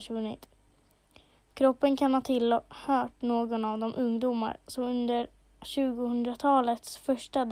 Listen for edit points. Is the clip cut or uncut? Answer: uncut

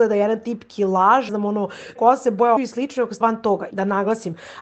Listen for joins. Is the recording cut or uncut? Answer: cut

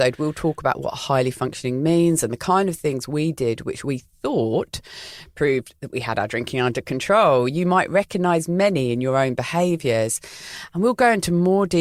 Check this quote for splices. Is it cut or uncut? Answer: uncut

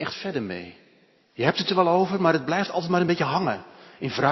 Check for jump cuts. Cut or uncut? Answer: uncut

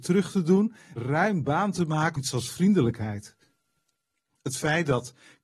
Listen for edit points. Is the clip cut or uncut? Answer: cut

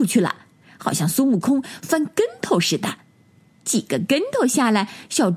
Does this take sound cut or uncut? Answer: uncut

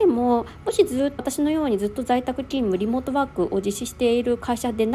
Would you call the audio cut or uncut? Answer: cut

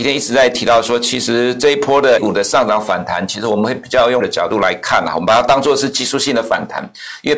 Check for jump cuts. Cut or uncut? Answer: cut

